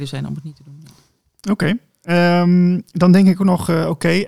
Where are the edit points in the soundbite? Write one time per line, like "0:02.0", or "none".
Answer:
none